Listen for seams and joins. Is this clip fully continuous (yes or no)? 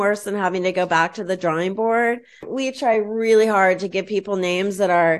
yes